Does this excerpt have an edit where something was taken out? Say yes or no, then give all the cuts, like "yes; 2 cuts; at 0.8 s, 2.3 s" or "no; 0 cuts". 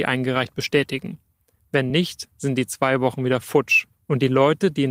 no; 0 cuts